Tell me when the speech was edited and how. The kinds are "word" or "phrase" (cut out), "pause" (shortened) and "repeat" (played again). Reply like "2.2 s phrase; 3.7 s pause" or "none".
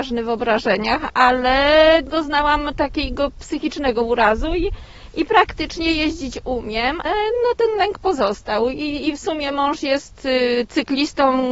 7.1 s word